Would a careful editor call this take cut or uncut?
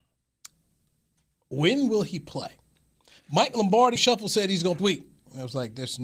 cut